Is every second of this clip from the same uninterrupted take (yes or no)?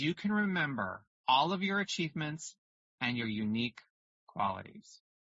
yes